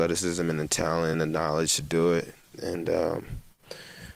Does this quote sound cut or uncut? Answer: uncut